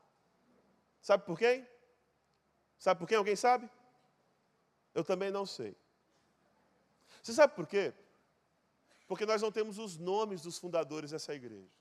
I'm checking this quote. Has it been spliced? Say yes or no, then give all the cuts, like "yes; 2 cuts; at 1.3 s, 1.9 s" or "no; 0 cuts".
no; 0 cuts